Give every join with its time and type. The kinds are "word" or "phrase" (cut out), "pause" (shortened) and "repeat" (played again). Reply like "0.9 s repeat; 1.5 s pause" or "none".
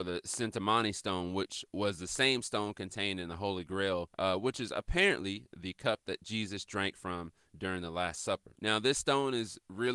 4.1 s pause; 8.5 s pause